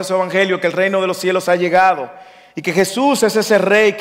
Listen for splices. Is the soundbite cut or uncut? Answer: uncut